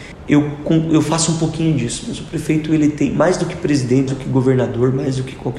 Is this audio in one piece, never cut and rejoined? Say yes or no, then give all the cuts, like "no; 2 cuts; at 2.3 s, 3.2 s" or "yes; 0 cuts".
no; 1 cut; at 4.1 s